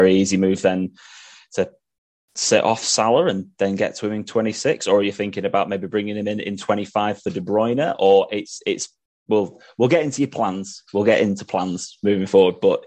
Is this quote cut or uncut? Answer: uncut